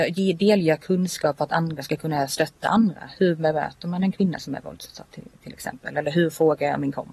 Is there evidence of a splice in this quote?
no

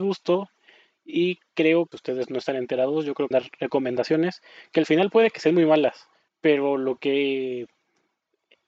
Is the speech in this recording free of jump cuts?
no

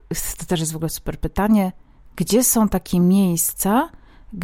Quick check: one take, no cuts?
yes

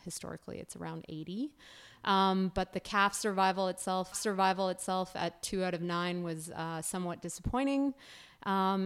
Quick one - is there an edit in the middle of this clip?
yes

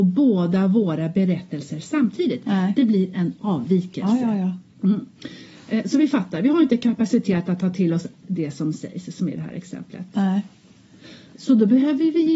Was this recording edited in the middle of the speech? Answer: yes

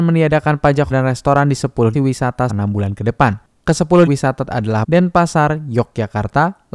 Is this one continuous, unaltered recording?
no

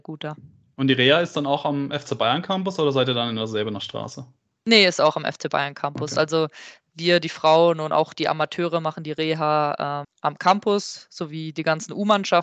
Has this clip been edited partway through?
yes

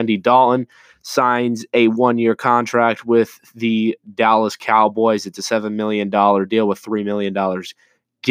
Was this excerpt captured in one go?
yes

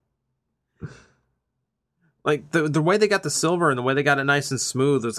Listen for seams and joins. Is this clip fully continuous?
yes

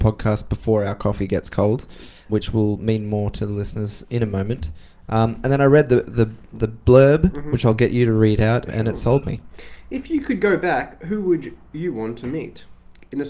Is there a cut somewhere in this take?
yes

